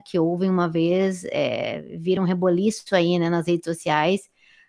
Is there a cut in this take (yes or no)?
no